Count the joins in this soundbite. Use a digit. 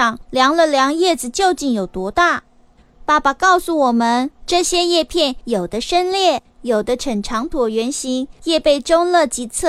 1